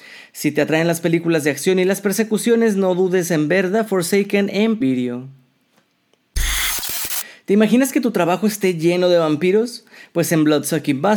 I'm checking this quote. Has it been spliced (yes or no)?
yes